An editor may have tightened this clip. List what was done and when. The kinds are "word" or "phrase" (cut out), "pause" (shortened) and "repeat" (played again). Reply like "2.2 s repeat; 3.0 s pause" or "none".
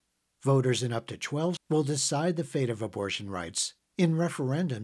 1.6 s word